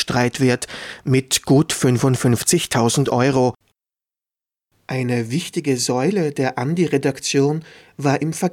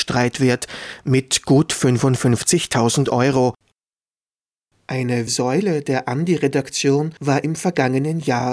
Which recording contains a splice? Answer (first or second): second